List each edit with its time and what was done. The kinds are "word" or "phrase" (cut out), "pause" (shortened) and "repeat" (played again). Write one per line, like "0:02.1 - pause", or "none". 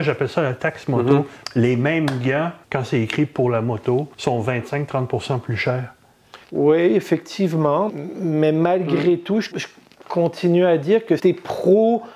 0:02.6 - pause
0:04.1 - pause
0:06.4 - pause
0:07.9 - word
0:09.5 - word
0:11.2 - word